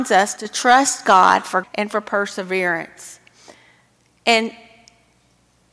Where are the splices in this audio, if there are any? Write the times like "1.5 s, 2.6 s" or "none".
1.6 s